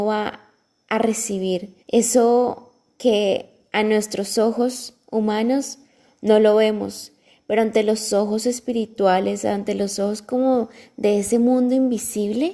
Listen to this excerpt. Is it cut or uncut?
cut